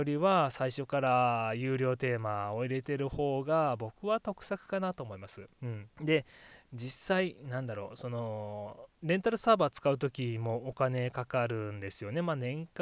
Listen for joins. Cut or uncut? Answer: cut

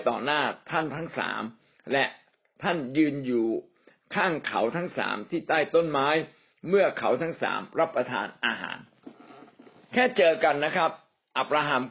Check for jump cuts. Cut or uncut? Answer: uncut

